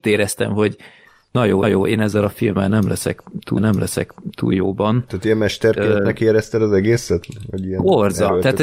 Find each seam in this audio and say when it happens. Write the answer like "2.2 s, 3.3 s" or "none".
1.6 s, 3.6 s